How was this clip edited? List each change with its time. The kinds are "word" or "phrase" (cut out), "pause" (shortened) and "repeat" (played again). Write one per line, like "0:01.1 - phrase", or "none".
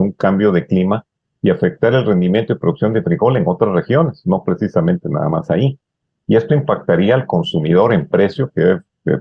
none